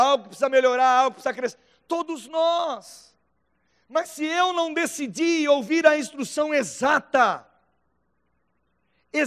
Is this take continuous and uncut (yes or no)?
yes